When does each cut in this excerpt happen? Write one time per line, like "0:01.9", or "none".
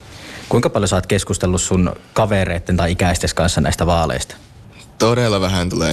none